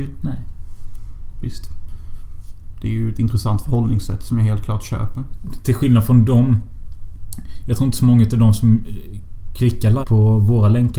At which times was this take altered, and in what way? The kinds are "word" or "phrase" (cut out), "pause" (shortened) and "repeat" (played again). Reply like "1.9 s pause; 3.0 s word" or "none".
10.0 s word